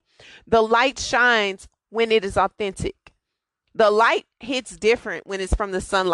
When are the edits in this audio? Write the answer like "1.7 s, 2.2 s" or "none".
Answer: none

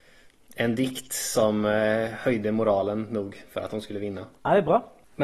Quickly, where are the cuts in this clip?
none

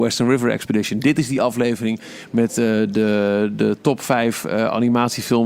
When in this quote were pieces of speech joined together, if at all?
none

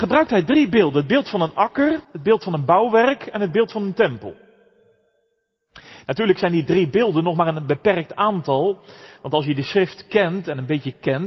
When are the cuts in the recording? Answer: 2.0 s

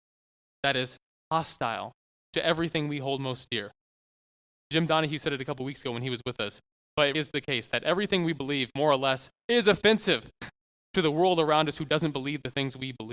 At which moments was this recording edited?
7.1 s

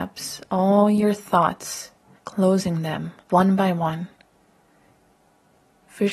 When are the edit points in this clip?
2.2 s, 3.2 s

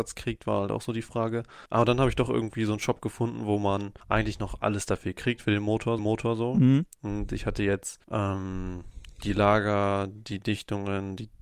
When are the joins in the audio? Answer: 1.7 s, 4.0 s, 6.0 s, 8.0 s

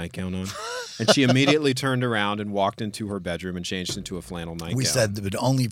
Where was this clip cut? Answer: none

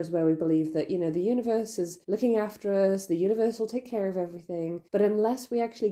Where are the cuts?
2.0 s, 4.9 s

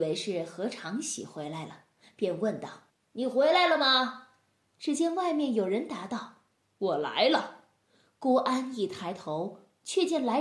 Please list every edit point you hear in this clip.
2.9 s

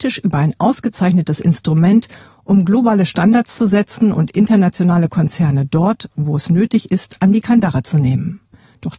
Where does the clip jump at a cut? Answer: none

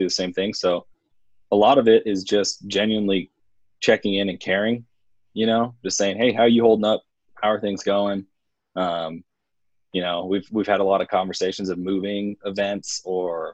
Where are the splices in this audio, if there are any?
none

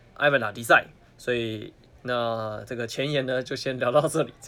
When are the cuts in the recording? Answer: 1.0 s

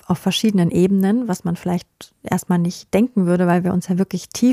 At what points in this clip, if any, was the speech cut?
none

